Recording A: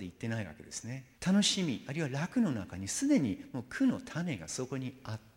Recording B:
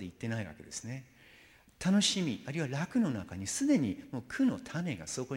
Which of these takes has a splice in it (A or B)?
A